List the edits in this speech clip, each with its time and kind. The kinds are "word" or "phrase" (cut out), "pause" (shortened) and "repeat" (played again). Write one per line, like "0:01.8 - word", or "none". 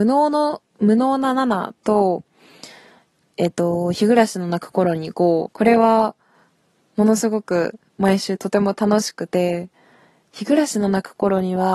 0:05.5 - word

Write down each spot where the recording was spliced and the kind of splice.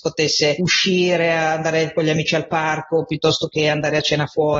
none

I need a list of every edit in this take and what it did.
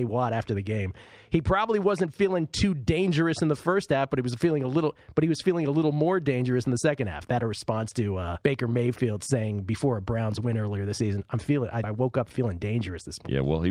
0:08.4 - pause
0:11.8 - word

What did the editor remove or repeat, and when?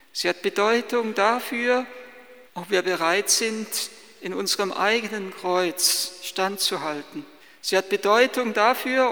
0:02.5 - pause
0:07.4 - pause

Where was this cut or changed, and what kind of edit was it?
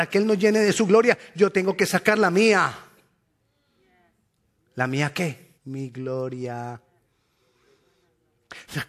0:05.6 - pause

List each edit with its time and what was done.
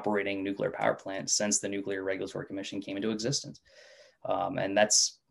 none

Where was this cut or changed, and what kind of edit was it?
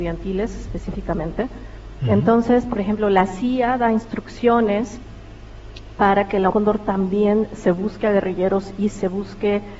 0:06.5 - word

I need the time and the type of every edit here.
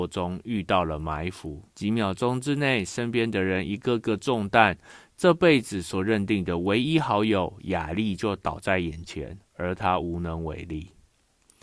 0:01.7 - pause

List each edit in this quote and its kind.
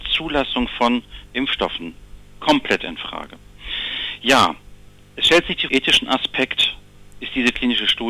0:05.7 - phrase

